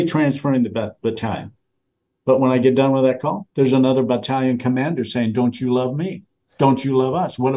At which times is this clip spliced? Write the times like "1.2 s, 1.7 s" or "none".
3.5 s